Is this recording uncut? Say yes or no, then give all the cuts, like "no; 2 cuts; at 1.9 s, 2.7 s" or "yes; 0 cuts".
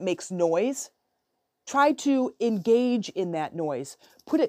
yes; 0 cuts